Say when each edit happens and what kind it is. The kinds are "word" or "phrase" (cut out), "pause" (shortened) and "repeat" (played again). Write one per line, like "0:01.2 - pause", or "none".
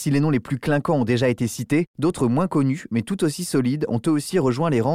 0:01.9 - pause